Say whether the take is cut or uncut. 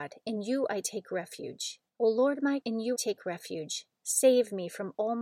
cut